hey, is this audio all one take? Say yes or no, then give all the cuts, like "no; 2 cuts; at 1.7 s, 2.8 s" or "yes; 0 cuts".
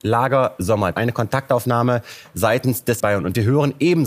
no; 2 cuts; at 0.9 s, 3.0 s